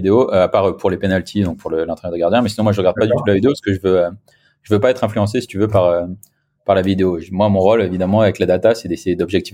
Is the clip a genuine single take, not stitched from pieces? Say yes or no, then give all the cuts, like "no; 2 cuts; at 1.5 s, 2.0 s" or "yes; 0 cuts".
yes; 0 cuts